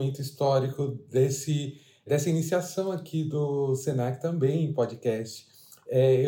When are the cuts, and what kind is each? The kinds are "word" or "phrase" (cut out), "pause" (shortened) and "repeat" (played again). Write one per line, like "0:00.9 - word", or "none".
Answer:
none